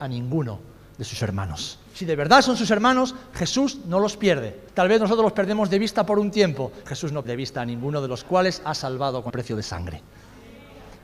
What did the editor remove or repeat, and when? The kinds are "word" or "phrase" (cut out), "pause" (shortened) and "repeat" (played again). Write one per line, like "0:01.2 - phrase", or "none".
0:01.9 - pause
0:04.7 - pause
0:06.9 - word
0:07.2 - word
0:09.3 - word